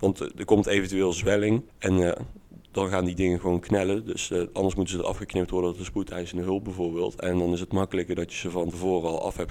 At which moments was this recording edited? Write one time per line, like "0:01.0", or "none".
0:01.7